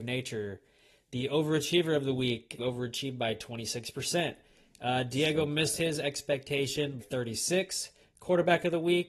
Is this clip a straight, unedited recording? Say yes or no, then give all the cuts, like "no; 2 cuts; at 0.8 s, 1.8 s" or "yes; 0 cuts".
no; 2 cuts; at 2.6 s, 7.0 s